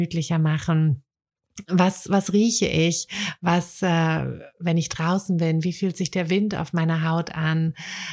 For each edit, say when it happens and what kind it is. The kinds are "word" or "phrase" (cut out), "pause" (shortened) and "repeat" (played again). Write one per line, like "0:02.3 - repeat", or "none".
none